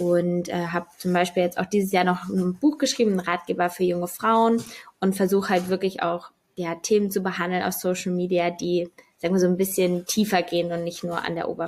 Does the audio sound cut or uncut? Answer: uncut